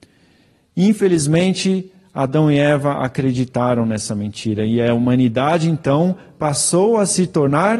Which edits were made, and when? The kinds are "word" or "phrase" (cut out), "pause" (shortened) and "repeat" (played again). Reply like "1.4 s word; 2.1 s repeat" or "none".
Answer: none